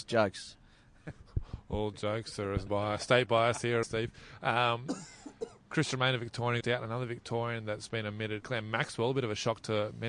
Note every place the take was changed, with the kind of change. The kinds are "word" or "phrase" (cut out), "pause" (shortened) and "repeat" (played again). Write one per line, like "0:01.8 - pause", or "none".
0:02.7 - word
0:03.8 - phrase
0:05.6 - pause
0:06.6 - phrase
0:08.4 - word